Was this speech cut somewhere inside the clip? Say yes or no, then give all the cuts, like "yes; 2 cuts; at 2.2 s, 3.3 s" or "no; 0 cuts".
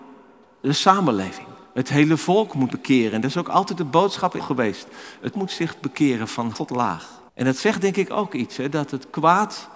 yes; 6 cuts; at 1.6 s, 2.7 s, 4.4 s, 5.3 s, 6.5 s, 7.3 s